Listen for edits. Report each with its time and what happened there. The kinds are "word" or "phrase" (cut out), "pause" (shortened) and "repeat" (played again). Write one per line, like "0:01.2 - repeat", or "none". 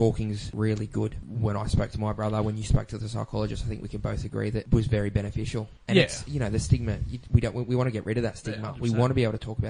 none